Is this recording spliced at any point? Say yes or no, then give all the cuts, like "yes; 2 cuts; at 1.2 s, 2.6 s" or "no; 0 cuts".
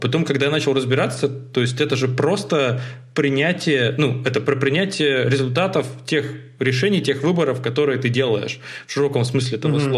no; 0 cuts